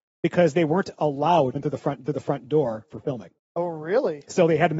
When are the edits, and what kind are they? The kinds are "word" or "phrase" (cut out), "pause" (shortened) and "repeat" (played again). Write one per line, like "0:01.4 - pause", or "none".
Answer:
0:01.5 - phrase
0:02.1 - repeat
0:03.4 - pause